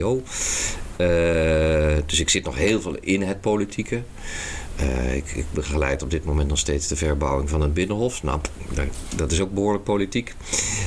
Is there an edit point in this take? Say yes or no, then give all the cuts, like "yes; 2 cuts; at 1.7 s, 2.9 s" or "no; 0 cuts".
no; 0 cuts